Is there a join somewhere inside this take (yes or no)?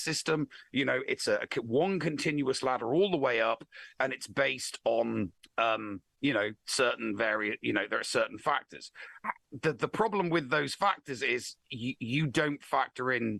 yes